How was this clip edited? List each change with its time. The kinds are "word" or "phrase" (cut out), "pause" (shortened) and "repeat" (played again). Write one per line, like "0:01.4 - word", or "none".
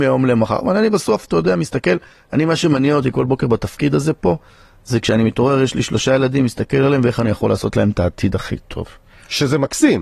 none